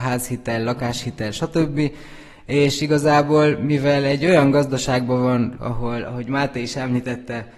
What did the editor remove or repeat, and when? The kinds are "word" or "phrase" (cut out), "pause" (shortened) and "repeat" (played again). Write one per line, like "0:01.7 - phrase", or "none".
0:05.6 - word